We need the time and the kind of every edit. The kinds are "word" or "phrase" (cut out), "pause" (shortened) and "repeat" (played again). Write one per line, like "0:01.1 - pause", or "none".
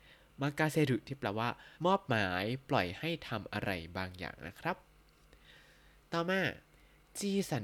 0:01.7 - pause